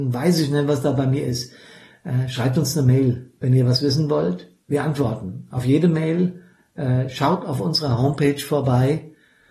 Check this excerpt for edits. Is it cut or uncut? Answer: uncut